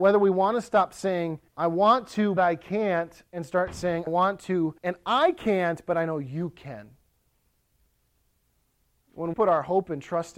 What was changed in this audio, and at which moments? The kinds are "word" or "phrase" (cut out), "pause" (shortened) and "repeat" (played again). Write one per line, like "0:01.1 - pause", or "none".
0:01.5 - pause
0:02.4 - word
0:04.1 - word
0:04.8 - pause
0:09.3 - word

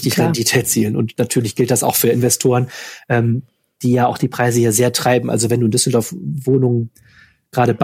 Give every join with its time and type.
none

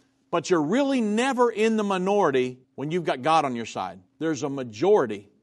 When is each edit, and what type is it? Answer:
0:02.6 - pause
0:04.1 - pause

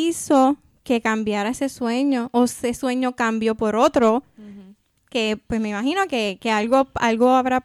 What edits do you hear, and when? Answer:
none

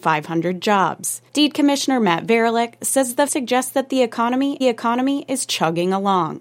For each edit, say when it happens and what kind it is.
0:01.3 - pause
0:03.3 - word
0:04.6 - repeat

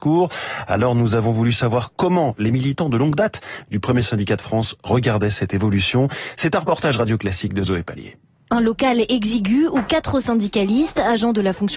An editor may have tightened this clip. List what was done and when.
none

